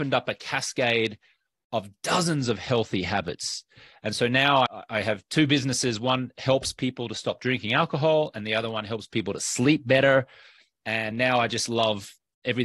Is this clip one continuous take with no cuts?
yes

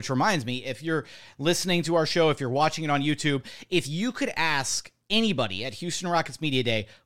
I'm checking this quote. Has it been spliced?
no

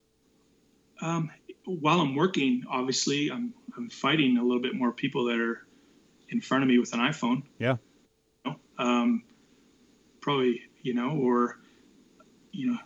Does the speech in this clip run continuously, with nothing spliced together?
yes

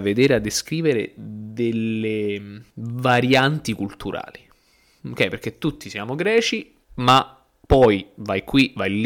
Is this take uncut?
no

